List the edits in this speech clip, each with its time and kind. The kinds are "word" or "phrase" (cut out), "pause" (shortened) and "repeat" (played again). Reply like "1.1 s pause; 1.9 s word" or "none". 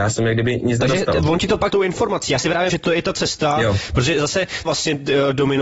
1.7 s word; 2.7 s word; 4.7 s phrase